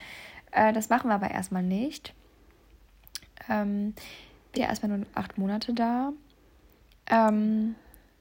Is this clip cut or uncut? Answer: cut